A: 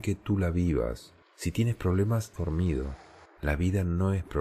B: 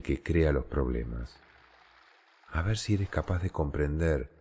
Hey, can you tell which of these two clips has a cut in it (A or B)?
A